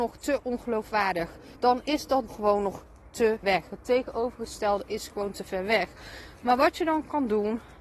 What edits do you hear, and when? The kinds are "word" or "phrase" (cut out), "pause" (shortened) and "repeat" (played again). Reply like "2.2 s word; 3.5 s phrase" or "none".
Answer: 1.6 s pause; 2.3 s word; 3.4 s word